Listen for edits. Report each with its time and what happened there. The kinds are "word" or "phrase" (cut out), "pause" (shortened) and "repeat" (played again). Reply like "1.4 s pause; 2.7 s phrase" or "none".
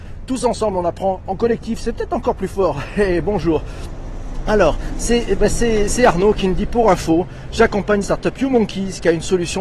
8.0 s phrase